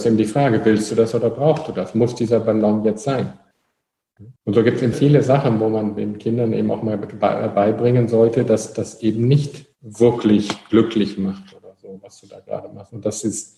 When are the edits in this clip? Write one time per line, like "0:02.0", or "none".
0:04.4
0:04.9
0:06.0
0:09.7